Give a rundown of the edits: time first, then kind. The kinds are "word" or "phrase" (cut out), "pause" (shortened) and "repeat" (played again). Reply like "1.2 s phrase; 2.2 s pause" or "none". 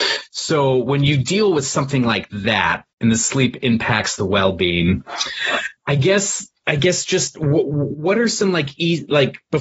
2.9 s pause